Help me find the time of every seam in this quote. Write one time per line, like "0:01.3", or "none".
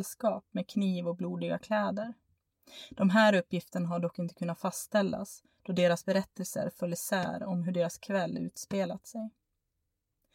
none

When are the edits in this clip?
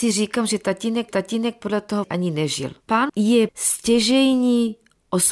0:01.1
0:02.0
0:03.1
0:03.5

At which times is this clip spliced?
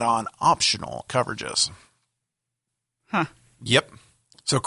0:01.1

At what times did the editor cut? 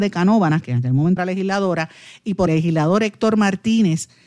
0:01.2
0:02.5

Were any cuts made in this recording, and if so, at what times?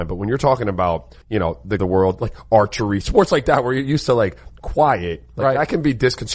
0:01.2
0:01.8

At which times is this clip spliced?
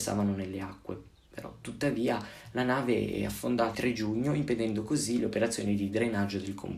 0:03.7

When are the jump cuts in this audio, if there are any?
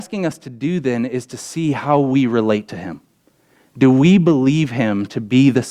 none

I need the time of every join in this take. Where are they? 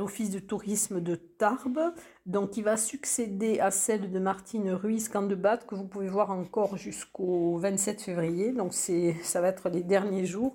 none

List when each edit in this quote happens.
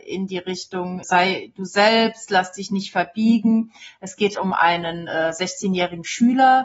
0:01.0
0:04.3

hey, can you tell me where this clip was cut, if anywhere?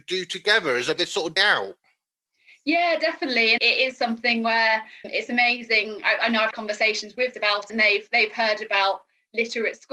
0:01.0
0:01.4
0:03.6
0:05.0
0:06.5
0:07.3
0:07.7

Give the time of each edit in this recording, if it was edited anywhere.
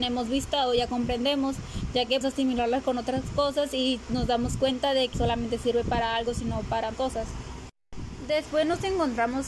0:02.2
0:05.1
0:06.9

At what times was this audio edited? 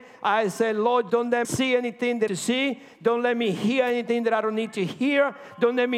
0:01.1
0:01.4
0:02.3

